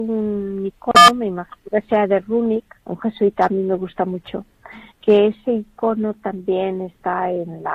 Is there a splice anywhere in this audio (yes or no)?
yes